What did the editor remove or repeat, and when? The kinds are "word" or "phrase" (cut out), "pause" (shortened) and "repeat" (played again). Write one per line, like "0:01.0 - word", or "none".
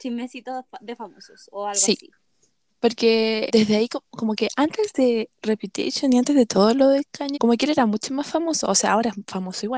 0:03.5 - word
0:07.3 - word